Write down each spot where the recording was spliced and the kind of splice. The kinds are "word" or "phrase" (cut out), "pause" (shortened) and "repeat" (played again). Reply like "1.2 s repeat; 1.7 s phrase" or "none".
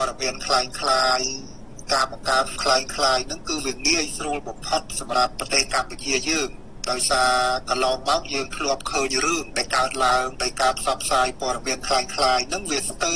2.6 s word